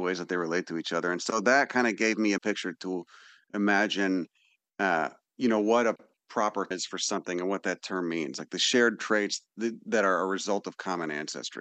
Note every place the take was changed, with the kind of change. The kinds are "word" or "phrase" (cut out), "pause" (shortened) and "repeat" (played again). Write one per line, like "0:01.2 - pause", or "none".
0:02.4 - word
0:06.7 - word